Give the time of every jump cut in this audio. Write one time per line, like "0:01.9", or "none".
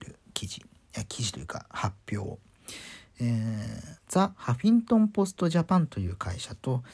0:04.0

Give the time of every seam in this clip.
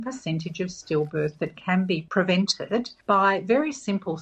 none

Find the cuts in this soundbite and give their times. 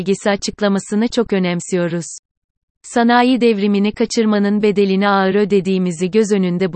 none

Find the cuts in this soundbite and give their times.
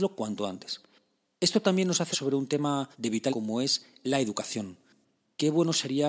0:02.1
0:02.9
0:03.3

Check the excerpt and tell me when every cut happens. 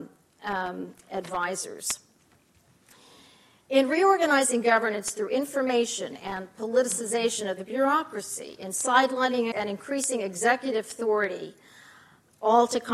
0:09.5

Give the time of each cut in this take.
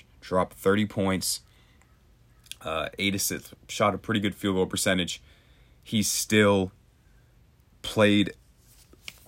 none

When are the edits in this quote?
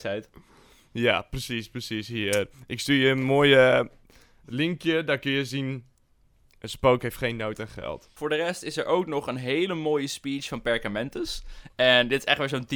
none

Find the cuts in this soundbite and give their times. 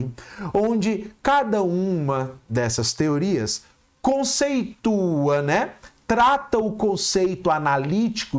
none

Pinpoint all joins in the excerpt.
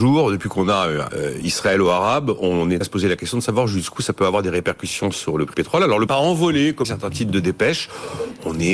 0:01.1
0:02.8
0:05.5
0:06.1
0:06.8

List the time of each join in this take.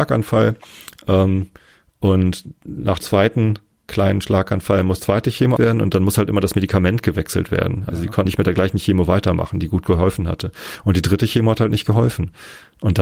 0:03.0
0:05.0
0:05.6
0:08.2

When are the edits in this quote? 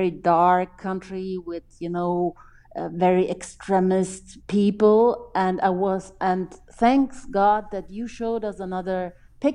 none

